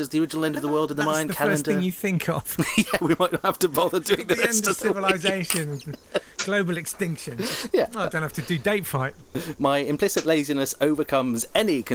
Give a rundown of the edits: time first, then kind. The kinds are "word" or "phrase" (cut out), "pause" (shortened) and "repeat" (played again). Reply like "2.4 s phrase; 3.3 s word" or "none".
none